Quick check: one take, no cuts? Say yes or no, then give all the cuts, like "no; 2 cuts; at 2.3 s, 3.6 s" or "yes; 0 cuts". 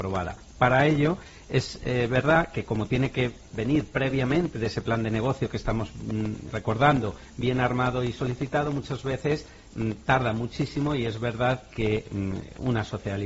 no; 1 cut; at 6.5 s